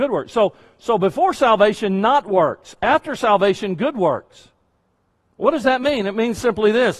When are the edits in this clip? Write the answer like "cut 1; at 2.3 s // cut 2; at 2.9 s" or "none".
none